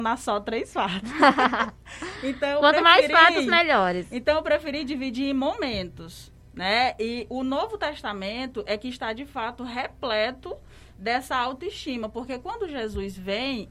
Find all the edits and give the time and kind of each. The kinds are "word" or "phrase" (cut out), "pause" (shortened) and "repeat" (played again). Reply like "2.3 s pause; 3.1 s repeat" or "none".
none